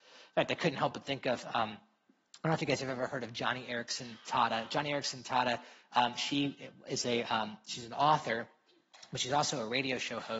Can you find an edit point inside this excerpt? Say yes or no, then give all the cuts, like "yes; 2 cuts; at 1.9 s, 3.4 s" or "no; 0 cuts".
no; 0 cuts